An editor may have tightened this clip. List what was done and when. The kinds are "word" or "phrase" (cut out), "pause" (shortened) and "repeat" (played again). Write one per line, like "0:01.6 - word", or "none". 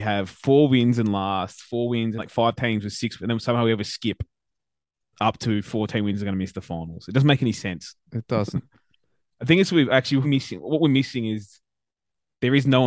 0:02.2 - word
0:03.2 - word
0:10.2 - word